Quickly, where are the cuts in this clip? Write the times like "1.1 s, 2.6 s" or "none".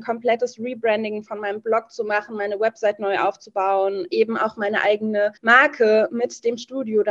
4.1 s, 5.4 s